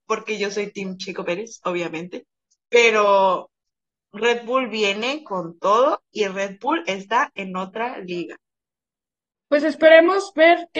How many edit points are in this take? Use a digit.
0